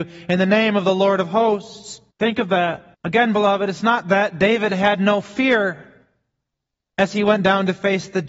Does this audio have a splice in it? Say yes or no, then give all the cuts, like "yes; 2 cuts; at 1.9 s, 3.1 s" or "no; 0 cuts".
yes; 2 cuts; at 2.1 s, 2.9 s